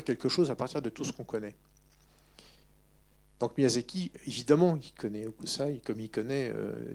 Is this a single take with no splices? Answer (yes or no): yes